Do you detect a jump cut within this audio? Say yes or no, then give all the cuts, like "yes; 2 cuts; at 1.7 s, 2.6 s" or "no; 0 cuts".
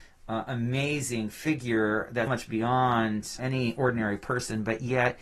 yes; 2 cuts; at 2.3 s, 3.4 s